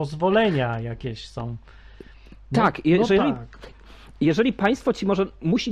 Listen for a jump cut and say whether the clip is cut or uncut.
uncut